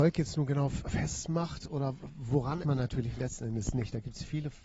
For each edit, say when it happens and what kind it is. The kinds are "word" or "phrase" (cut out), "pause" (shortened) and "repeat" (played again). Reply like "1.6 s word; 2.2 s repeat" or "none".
2.6 s phrase